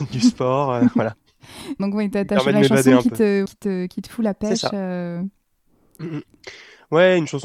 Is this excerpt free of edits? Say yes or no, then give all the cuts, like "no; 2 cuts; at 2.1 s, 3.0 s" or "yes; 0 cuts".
no; 2 cuts; at 1.8 s, 3.5 s